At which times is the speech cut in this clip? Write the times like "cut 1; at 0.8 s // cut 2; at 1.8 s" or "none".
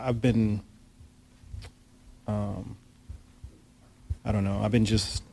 cut 1; at 4.2 s